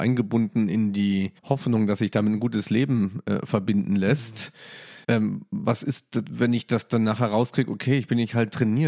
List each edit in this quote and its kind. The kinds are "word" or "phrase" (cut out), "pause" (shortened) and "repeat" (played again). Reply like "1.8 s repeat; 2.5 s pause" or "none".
1.4 s pause; 5.0 s pause